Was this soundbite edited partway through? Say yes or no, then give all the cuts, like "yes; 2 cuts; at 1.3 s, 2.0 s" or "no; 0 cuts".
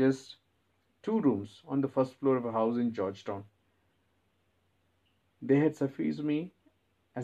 no; 0 cuts